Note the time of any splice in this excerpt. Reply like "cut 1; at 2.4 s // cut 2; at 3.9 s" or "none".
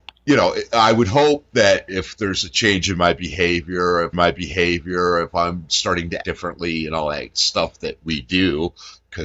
cut 1; at 4.1 s // cut 2; at 6.2 s